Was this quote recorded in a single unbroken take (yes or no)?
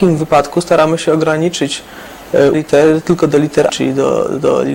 no